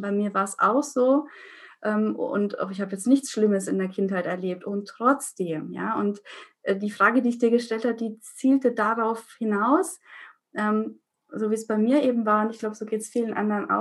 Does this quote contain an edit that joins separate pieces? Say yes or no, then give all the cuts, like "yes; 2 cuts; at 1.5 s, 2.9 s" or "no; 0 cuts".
no; 0 cuts